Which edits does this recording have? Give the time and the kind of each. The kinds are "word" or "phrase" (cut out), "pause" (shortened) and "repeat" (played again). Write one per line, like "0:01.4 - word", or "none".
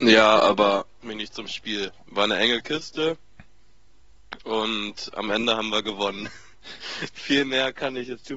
0:01.0 - word
0:02.0 - pause
0:04.4 - pause
0:07.1 - word